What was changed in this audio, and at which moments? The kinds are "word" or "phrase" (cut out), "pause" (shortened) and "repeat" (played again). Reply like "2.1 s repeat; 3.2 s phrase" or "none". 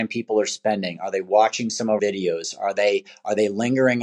2.0 s word